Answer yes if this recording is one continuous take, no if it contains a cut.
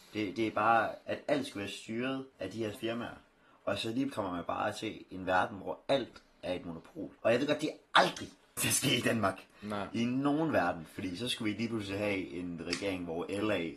no